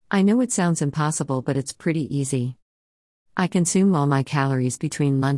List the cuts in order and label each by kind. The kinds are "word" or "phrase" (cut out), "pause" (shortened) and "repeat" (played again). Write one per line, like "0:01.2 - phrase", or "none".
none